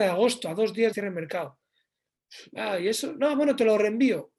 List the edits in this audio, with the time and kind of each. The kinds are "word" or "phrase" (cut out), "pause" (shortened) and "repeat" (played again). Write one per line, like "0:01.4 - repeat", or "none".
0:00.9 - word